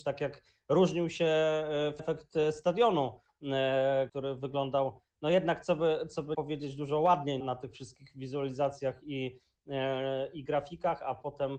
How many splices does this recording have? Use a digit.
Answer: 4